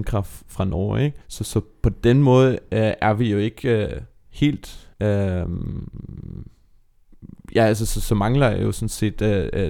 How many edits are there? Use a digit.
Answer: 2